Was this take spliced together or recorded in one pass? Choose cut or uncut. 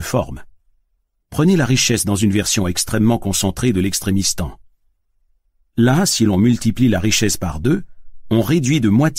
uncut